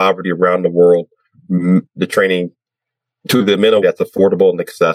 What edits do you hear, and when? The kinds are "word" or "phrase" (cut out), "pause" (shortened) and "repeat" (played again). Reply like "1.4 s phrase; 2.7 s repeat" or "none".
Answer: 1.9 s word; 3.8 s word